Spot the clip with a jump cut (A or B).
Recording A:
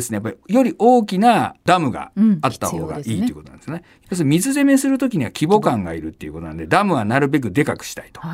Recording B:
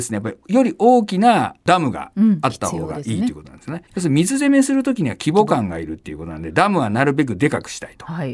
B